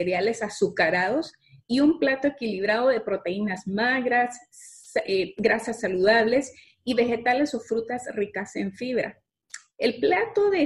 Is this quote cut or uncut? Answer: uncut